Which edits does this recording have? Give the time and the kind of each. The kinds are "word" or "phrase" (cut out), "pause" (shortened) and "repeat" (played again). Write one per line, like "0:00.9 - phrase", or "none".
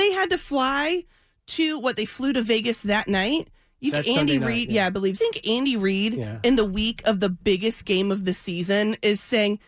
0:03.9 - word
0:05.2 - phrase